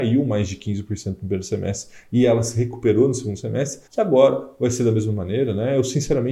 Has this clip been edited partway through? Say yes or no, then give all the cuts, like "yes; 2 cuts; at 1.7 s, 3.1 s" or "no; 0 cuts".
yes; 1 cut; at 3.9 s